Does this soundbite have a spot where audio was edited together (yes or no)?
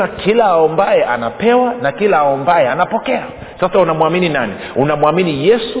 no